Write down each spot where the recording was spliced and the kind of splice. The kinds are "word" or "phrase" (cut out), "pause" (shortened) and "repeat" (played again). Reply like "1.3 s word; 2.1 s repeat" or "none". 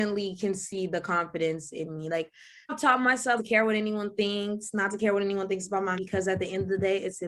2.7 s word; 3.4 s word; 6.0 s word

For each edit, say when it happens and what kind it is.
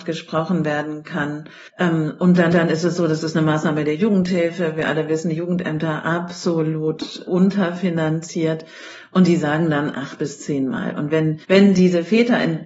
1.7 s pause; 2.5 s repeat; 11.4 s pause

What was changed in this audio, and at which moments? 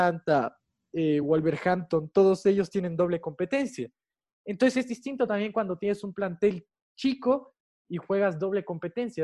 none

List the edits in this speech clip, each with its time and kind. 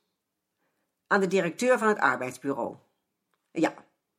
none

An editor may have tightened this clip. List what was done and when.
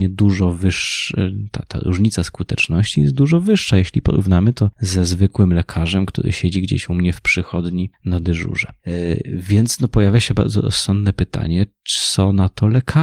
none

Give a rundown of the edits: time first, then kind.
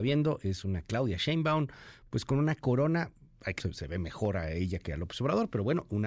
3.6 s word

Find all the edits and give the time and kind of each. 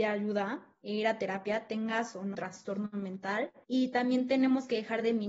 2.3 s word; 3.6 s pause

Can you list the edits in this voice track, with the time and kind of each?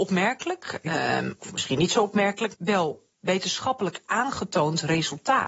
2.5 s word

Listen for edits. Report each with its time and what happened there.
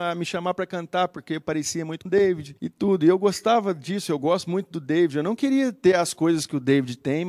2.1 s word; 2.6 s pause

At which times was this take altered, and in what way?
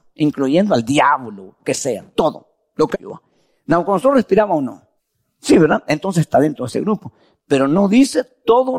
1.6 s word; 2.9 s phrase; 5.0 s pause

